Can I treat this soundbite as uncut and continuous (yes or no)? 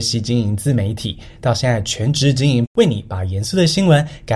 no